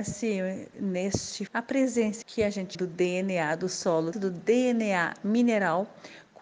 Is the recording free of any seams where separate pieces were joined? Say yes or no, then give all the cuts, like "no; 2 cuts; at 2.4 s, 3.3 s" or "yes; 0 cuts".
no; 4 cuts; at 1.5 s, 2.2 s, 2.7 s, 4.1 s